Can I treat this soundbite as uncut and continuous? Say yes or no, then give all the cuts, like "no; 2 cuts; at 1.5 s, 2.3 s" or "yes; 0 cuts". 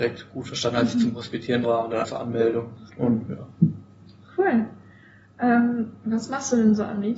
no; 3 cuts; at 1.6 s, 2.0 s, 2.9 s